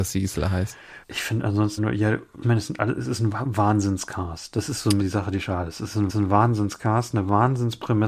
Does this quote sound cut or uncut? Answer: cut